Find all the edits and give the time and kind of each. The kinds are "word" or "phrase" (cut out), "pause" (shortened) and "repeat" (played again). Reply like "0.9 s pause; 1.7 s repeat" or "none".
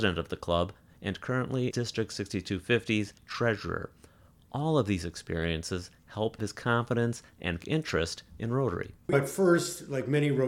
1.7 s word; 3.2 s word; 6.4 s word; 7.6 s word; 9.1 s word

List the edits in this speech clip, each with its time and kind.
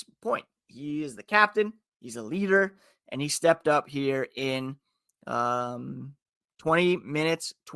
none

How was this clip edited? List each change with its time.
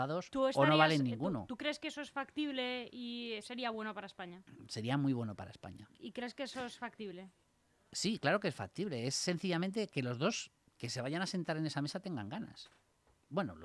none

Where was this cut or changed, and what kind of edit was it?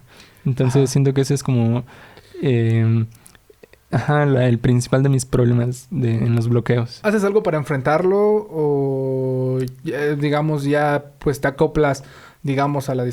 none

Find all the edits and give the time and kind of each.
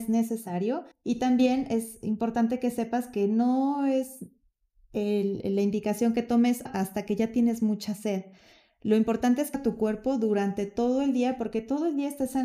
0.9 s pause; 6.7 s word; 9.5 s phrase

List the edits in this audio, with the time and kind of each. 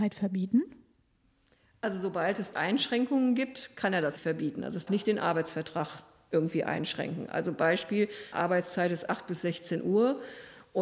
2.5 s word; 4.9 s word; 8.3 s word

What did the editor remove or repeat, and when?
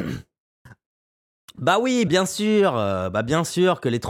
2.1 s phrase

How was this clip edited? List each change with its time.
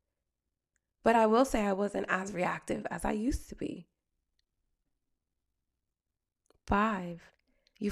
none

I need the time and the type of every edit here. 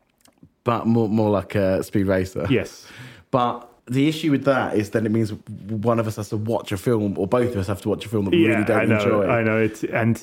3.8 s pause; 5.4 s pause

